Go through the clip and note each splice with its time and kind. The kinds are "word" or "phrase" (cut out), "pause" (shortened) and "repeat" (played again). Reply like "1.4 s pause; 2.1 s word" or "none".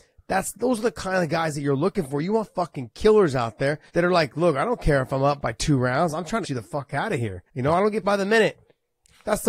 3.9 s pause; 5.4 s word; 6.4 s word; 7.5 s pause; 8.0 s word